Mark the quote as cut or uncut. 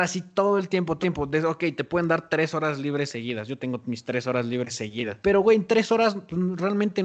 cut